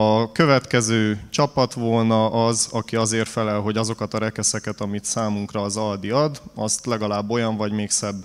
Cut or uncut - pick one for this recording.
uncut